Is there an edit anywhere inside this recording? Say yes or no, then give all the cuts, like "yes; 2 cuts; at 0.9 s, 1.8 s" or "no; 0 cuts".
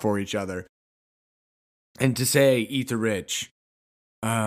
no; 0 cuts